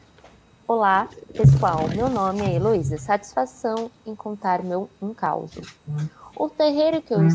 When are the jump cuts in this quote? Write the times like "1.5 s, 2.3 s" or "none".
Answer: none